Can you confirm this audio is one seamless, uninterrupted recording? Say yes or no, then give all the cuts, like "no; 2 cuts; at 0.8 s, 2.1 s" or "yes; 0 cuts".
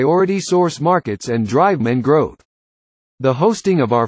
no; 1 cut; at 1.8 s